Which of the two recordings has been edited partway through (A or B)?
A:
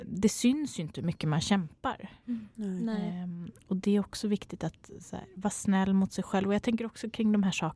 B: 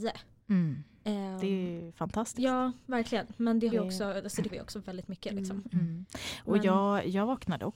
B